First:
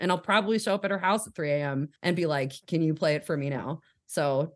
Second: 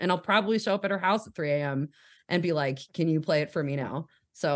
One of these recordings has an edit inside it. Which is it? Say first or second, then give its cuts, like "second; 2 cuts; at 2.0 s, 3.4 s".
first; 1 cut; at 2.0 s